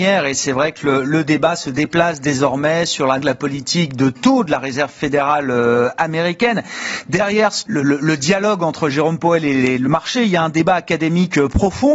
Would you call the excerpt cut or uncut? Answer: cut